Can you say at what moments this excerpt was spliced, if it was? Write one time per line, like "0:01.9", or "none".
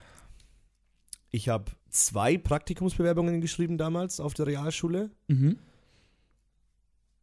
0:01.8